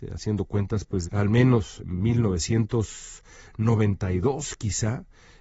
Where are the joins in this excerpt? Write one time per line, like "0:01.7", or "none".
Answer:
0:01.1
0:01.8